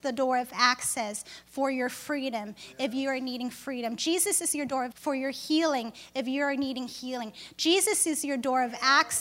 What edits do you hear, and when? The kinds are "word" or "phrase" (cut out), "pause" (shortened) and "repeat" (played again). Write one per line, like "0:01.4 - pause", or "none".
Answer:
0:04.9 - word